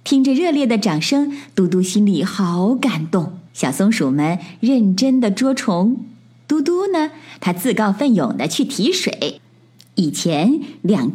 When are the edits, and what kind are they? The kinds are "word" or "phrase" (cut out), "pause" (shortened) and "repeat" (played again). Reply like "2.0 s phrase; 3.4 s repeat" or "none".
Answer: 3.5 s pause